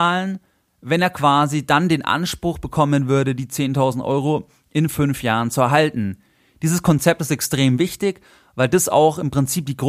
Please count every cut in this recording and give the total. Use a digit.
0